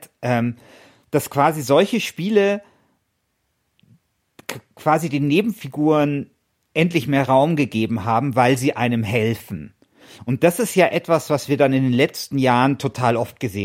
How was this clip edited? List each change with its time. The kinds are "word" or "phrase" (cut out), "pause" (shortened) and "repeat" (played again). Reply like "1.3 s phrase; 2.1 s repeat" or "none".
none